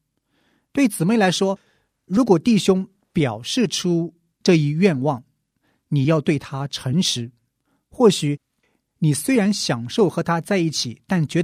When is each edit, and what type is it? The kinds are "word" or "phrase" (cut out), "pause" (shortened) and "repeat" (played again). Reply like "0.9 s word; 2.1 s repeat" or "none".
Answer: none